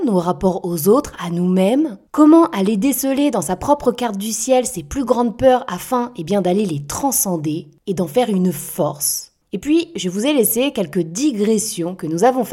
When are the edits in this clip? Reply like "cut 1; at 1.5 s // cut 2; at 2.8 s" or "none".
none